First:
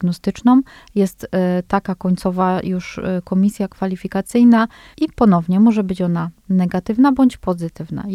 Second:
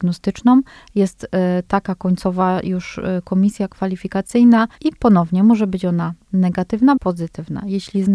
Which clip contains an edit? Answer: second; 2 cuts; at 4.8 s, 7.0 s

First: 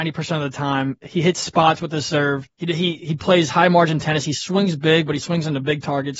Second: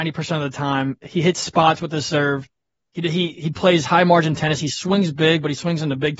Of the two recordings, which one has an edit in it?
first; 1 cut; at 2.5 s

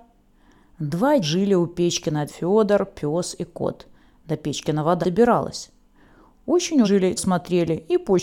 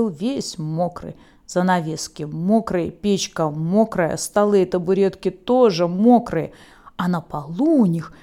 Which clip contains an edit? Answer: first; 5 cuts; at 1.2 s, 2.3 s, 5.0 s, 6.8 s, 7.2 s

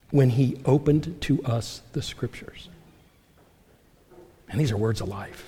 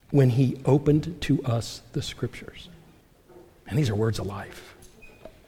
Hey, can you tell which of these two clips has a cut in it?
second; 1 cut; at 3.0 s

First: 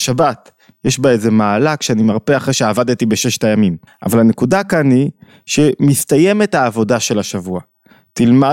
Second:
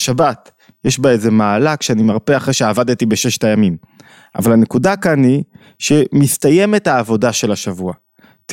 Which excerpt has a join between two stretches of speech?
first; 1 cut; at 3.9 s

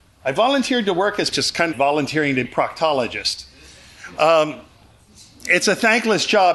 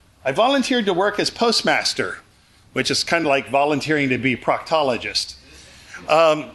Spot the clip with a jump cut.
first; 3 cuts; at 1.3 s, 1.7 s, 2.4 s

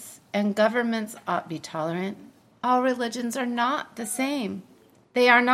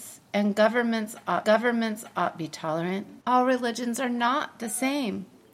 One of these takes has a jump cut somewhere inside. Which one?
second; 2 cuts; at 1.4 s, 3.2 s

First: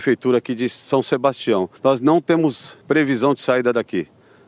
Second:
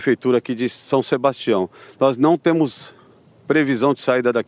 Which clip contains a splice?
first; 2 cuts; at 1.8 s, 2.8 s

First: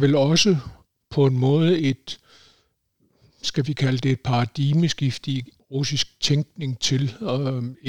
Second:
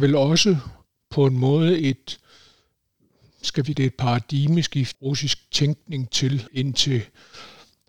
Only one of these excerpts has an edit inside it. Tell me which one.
second; 3 cuts; at 3.7 s, 4.9 s, 6.5 s

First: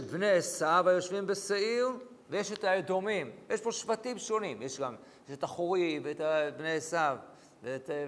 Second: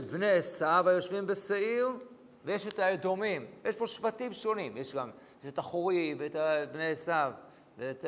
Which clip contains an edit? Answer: first; 1 cut; at 2.2 s

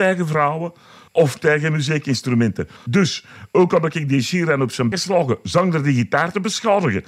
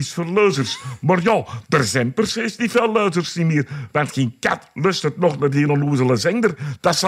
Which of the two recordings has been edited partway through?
first; 1 cut; at 4.9 s

